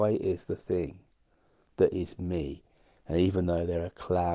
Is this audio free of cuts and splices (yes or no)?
yes